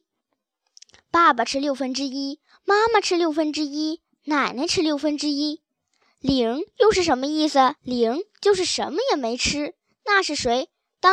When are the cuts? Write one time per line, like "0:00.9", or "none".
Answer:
0:07.8